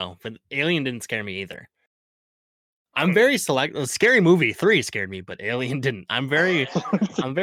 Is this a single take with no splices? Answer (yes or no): yes